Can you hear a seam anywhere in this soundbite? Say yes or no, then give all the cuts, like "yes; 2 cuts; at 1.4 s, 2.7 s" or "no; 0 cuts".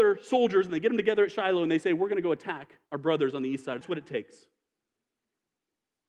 yes; 2 cuts; at 2.8 s, 3.8 s